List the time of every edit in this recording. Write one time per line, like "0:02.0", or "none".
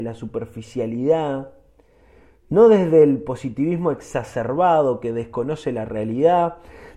none